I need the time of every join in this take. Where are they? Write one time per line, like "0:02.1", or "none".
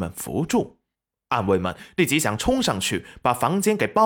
0:00.9